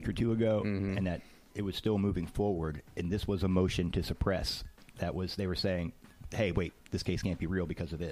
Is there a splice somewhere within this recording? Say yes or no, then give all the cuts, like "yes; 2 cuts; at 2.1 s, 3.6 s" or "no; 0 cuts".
no; 0 cuts